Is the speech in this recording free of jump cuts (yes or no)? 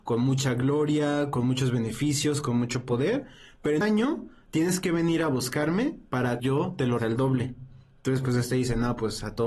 no